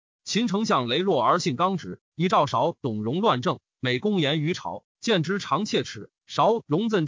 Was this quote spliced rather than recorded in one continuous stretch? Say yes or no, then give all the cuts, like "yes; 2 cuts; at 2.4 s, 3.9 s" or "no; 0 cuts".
yes; 1 cut; at 6.2 s